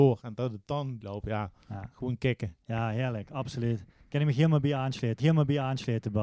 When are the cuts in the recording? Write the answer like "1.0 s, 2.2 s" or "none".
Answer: 1.0 s, 5.2 s